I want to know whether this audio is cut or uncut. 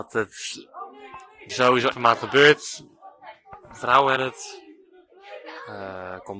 cut